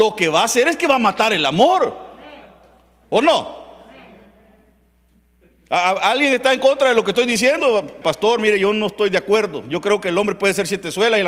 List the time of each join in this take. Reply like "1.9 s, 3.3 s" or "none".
8.0 s